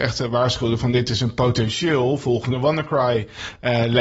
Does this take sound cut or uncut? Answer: uncut